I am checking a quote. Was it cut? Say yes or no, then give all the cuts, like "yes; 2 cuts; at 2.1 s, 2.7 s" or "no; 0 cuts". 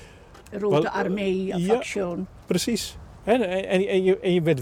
no; 0 cuts